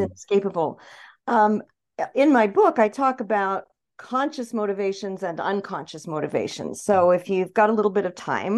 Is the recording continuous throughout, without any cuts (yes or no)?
yes